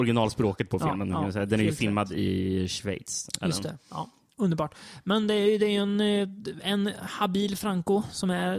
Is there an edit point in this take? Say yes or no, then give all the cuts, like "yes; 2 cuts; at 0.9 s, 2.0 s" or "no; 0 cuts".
no; 0 cuts